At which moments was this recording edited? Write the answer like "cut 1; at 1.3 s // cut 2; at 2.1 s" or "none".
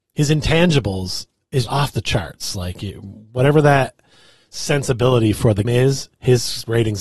cut 1; at 1.7 s // cut 2; at 5.6 s